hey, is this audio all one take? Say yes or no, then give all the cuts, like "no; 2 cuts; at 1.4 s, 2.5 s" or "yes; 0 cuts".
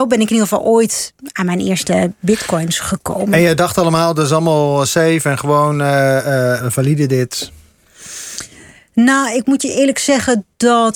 no; 1 cut; at 6.6 s